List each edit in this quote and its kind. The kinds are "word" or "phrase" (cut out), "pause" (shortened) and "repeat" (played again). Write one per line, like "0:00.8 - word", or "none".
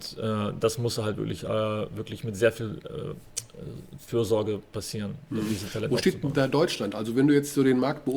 none